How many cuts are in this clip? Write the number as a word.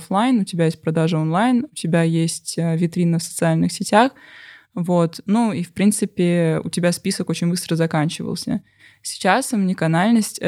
zero